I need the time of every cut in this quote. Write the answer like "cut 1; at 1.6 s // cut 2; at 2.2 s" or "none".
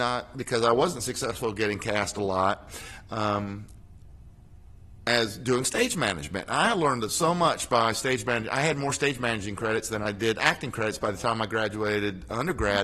none